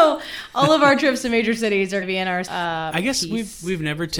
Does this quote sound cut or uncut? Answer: cut